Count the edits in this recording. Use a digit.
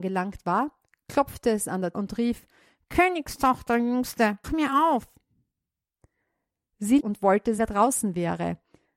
4